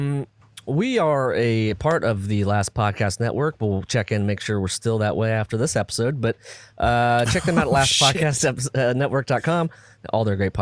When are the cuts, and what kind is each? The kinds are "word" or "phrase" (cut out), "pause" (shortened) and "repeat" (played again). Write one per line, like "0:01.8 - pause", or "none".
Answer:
none